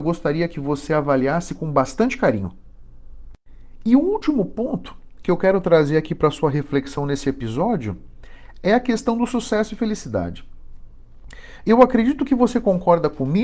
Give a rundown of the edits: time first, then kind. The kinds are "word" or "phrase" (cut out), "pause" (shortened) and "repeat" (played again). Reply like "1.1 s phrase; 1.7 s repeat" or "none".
none